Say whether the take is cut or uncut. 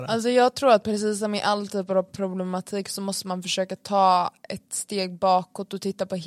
uncut